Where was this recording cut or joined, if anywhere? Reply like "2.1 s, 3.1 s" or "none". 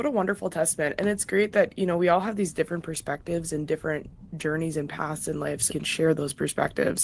5.7 s